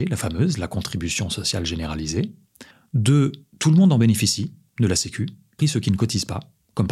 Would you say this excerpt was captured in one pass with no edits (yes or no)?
no